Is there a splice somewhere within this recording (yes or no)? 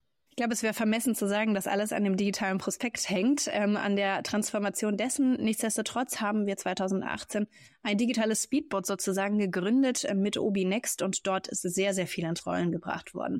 no